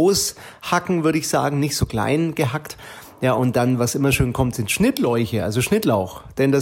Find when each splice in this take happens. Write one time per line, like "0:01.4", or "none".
none